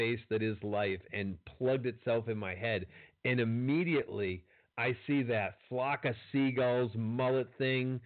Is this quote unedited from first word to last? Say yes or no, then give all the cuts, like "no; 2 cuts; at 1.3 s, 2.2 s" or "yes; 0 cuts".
yes; 0 cuts